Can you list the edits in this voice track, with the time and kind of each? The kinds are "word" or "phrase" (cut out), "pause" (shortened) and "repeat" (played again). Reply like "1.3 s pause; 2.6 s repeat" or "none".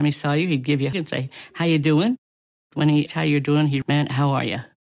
0.9 s word; 3.1 s word; 3.8 s word